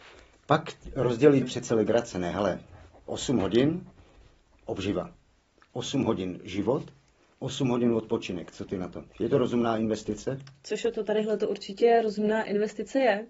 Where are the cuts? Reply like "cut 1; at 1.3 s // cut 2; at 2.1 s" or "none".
cut 1; at 1.4 s // cut 2; at 9.1 s